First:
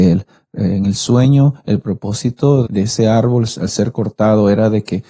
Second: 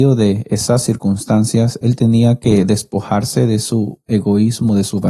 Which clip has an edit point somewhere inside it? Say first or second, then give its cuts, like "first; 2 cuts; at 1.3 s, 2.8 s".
first; 1 cut; at 2.7 s